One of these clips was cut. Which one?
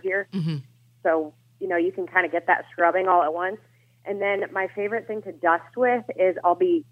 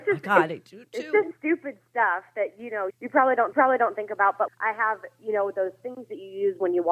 second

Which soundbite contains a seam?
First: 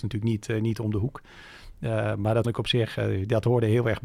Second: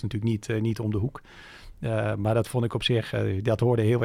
first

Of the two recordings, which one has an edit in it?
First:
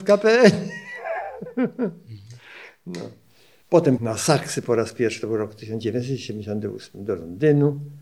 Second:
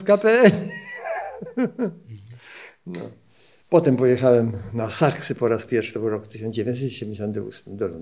first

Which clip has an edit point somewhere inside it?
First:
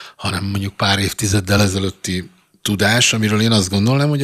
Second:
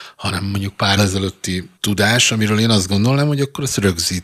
second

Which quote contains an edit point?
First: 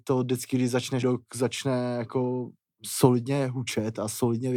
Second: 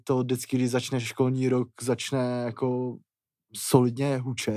first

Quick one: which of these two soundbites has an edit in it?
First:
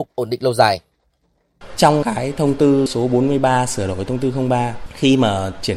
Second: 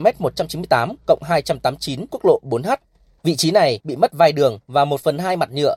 second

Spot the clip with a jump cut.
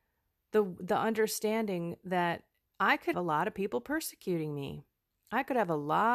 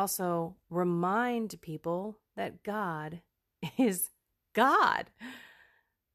first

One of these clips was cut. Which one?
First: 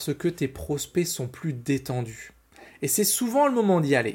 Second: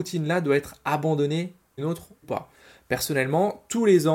second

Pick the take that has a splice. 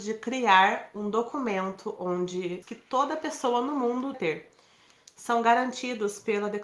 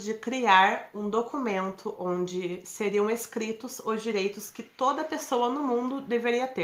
first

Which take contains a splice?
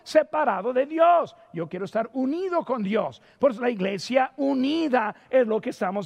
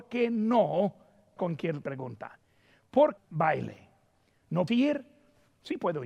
second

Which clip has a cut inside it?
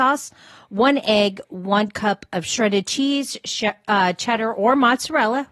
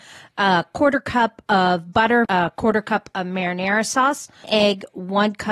second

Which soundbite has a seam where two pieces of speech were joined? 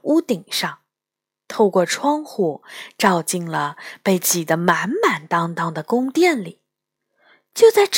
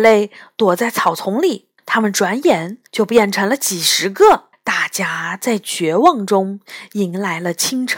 second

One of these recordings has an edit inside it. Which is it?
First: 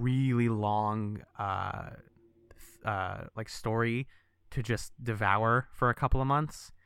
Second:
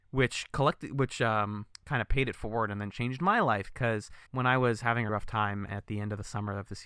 second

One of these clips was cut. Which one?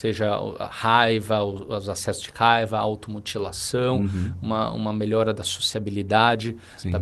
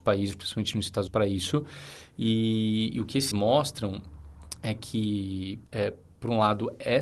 second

